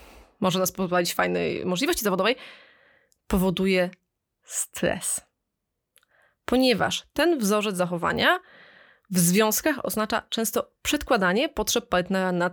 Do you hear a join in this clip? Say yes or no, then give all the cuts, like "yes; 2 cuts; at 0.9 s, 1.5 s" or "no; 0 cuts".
no; 0 cuts